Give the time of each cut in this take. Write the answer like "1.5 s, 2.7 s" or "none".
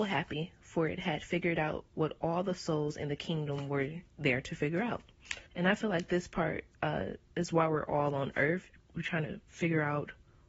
1.9 s, 4.1 s, 5.5 s